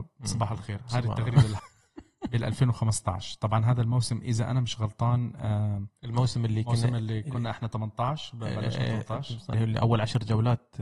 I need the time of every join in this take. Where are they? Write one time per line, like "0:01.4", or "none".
0:01.6
0:09.5